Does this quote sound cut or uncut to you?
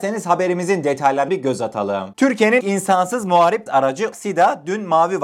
cut